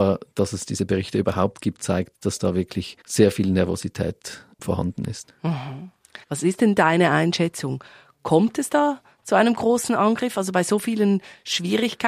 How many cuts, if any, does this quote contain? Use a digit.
3